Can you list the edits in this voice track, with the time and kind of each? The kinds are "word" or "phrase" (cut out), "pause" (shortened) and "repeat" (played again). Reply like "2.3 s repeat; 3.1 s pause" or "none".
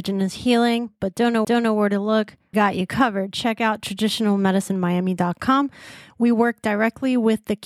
1.4 s repeat; 2.5 s word